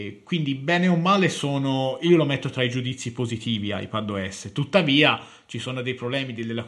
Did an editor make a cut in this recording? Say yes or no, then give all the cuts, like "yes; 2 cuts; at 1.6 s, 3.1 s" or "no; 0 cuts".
no; 0 cuts